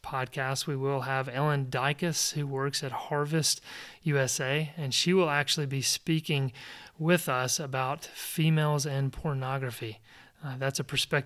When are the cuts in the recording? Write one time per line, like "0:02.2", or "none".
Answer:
none